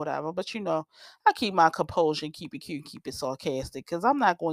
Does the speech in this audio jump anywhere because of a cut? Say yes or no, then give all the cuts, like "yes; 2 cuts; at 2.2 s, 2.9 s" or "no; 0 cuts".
no; 0 cuts